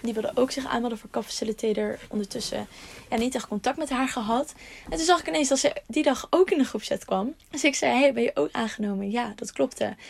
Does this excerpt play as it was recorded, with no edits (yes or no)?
no